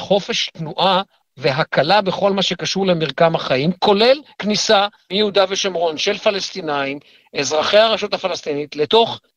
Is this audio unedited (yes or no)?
yes